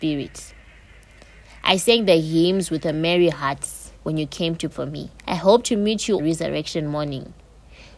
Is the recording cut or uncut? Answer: cut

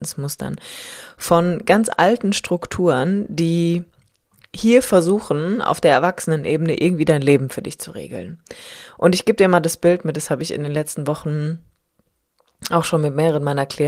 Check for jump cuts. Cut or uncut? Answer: uncut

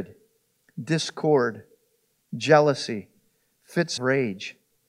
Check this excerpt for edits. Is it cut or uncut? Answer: cut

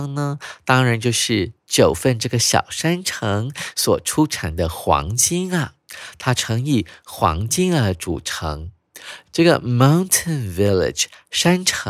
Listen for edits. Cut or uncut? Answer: uncut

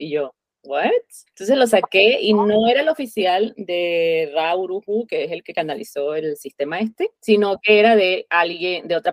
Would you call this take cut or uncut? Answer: cut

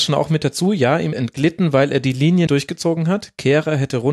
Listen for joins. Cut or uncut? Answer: cut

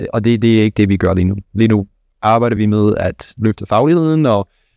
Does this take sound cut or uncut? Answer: uncut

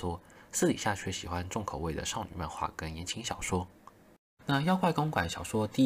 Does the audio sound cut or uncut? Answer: uncut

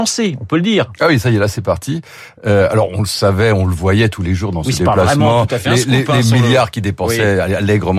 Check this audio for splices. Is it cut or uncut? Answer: uncut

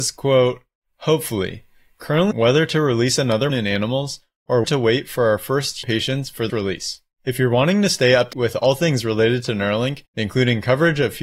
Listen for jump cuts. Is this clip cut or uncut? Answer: cut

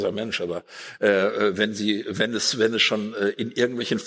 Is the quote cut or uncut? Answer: uncut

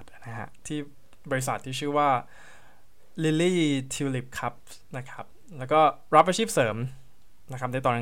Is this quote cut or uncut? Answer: uncut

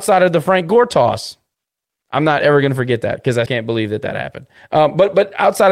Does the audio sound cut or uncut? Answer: cut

